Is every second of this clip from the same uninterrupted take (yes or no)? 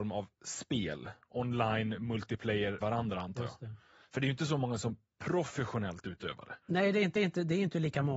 no